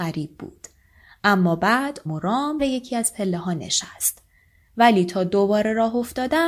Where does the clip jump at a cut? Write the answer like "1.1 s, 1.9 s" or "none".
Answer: 2.1 s, 2.6 s